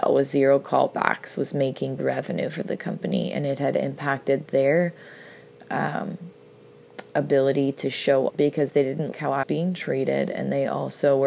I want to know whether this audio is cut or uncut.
cut